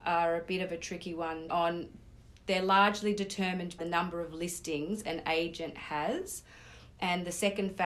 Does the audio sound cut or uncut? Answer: cut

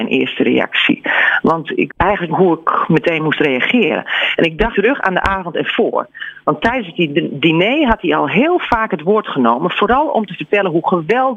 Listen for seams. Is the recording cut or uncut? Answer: cut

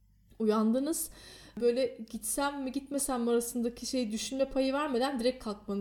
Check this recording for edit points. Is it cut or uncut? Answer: uncut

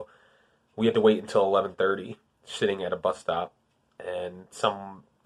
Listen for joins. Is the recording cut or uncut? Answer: uncut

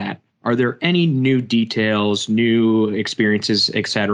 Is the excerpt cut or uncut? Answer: uncut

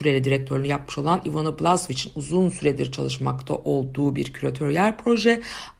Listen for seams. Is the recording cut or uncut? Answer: uncut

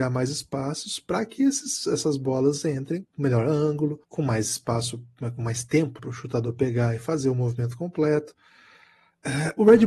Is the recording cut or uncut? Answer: cut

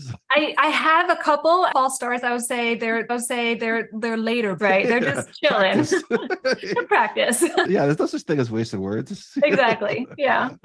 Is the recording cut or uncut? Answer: cut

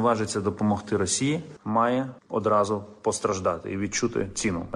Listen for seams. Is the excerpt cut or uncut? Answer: uncut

